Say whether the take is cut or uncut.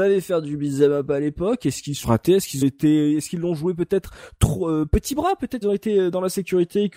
cut